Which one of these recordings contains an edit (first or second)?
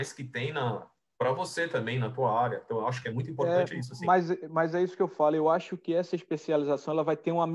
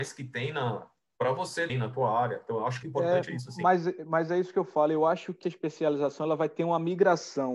second